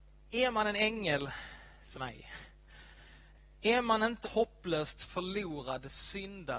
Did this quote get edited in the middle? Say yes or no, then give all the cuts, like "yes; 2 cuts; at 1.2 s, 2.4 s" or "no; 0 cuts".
yes; 2 cuts; at 1.9 s, 4.2 s